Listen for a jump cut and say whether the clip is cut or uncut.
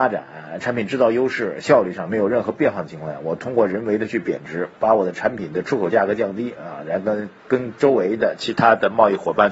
cut